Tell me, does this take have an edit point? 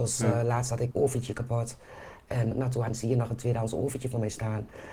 yes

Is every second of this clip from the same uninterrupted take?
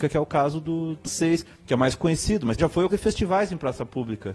no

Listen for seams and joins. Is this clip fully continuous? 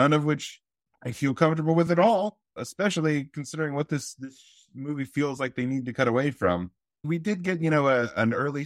yes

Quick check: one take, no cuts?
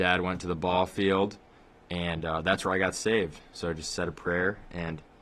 yes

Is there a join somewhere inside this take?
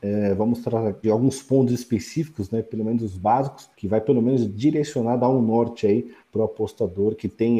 yes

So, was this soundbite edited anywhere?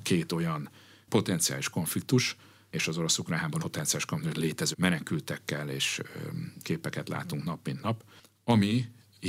yes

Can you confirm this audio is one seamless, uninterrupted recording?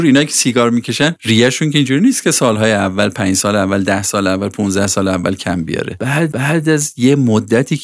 no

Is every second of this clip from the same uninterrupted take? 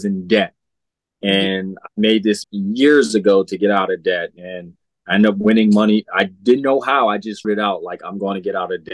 no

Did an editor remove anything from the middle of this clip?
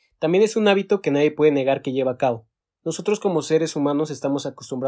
no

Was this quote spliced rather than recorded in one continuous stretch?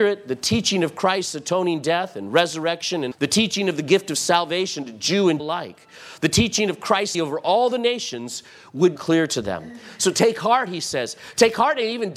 yes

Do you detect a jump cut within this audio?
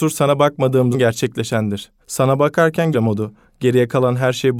yes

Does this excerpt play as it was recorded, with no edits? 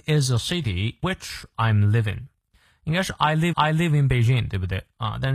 no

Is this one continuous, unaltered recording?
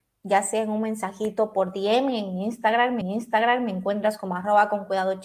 no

